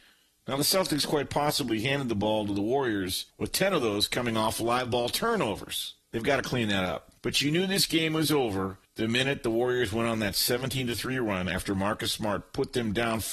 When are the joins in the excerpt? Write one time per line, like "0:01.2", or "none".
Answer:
0:03.3
0:06.0
0:07.2
0:08.8